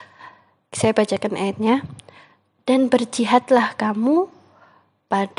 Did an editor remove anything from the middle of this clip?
no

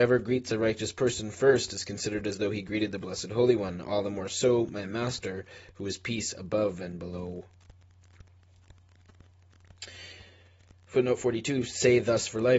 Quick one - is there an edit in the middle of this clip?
no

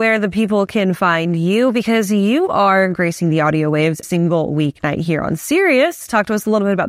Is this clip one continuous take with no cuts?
no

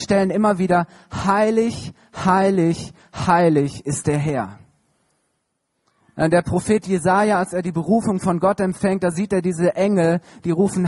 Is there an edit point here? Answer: no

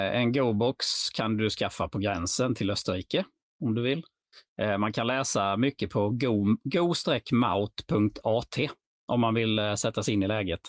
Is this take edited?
no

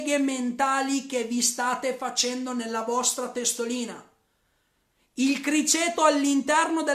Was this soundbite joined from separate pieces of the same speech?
no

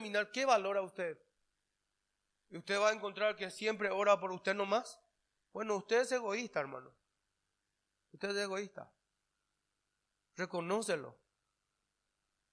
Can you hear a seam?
no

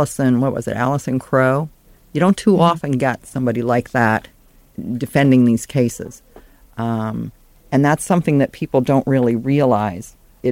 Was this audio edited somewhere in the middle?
no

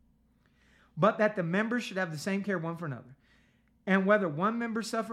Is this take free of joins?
yes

